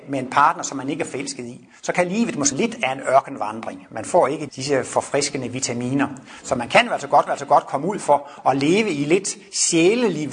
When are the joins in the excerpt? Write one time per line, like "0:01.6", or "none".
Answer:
0:02.5
0:04.5
0:07.3